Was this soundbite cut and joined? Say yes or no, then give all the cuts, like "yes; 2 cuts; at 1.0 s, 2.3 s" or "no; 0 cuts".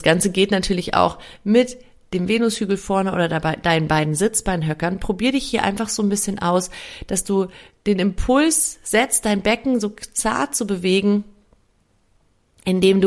no; 0 cuts